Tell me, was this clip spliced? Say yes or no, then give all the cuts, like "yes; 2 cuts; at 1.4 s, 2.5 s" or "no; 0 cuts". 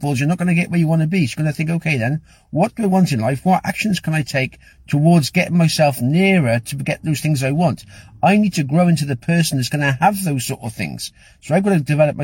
no; 0 cuts